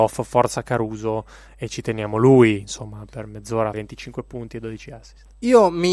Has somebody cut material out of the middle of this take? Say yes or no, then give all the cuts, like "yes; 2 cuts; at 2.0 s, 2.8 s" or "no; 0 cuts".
yes; 1 cut; at 3.7 s